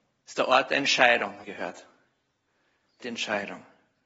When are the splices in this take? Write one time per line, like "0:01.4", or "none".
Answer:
0:01.4
0:03.0

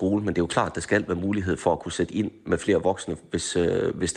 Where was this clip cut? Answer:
none

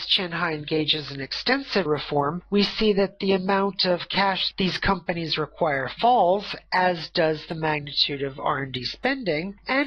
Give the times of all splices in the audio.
0:01.9

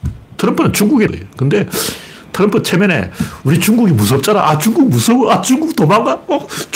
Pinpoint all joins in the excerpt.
0:01.1

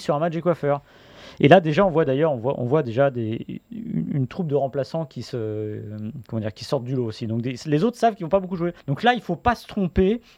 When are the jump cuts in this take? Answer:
0:08.8

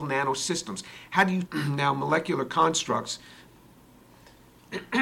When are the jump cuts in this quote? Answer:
0:01.4

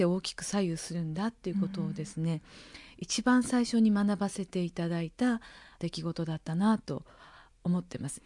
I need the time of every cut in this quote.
none

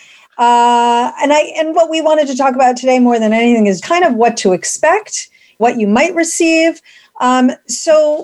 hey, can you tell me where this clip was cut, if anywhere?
0:01.7
0:03.8
0:05.6

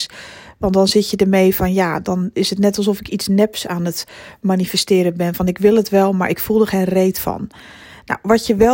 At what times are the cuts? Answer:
none

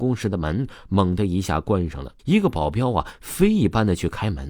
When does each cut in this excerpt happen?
0:02.2

